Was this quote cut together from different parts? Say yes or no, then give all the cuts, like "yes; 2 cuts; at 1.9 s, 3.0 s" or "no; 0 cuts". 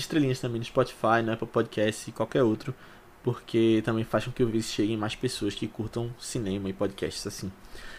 no; 0 cuts